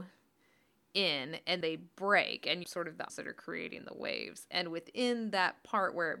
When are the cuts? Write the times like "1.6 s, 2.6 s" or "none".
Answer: 1.6 s, 2.6 s, 3.1 s